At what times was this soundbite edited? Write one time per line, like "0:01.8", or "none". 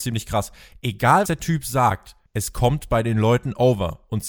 0:01.3
0:02.3